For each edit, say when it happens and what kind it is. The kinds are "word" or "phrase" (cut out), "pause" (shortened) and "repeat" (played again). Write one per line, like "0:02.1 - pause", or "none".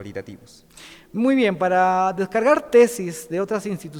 none